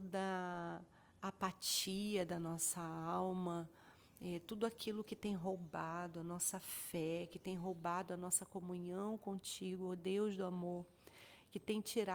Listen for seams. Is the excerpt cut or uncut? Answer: uncut